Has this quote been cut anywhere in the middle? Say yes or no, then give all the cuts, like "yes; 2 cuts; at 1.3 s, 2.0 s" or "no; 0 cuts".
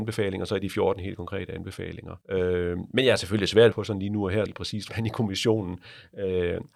yes; 4 cuts; at 2.2 s, 3.7 s, 4.5 s, 4.9 s